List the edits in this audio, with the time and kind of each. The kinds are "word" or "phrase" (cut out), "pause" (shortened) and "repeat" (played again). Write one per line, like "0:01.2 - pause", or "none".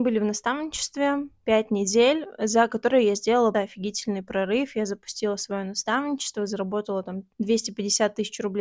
0:03.5 - word
0:07.3 - pause